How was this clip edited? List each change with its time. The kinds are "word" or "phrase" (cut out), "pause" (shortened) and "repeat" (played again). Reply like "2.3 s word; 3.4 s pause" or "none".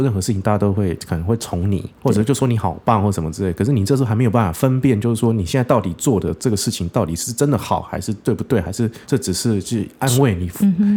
2.0 s pause; 9.0 s pause